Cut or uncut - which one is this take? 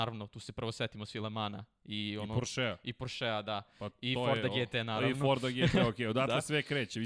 uncut